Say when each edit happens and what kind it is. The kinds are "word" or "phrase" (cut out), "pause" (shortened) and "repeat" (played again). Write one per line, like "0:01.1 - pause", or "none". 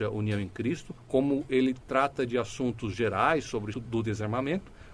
0:03.7 - word